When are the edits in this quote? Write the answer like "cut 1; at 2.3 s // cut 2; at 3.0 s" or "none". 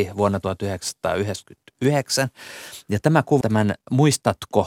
cut 1; at 3.4 s